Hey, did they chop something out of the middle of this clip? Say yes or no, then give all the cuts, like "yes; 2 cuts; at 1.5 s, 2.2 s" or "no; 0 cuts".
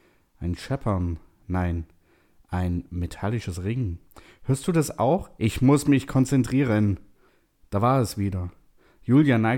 no; 0 cuts